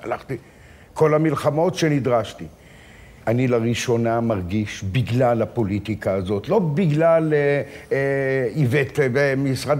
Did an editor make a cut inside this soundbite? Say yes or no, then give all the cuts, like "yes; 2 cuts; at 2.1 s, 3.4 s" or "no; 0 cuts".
yes; 1 cut; at 3.2 s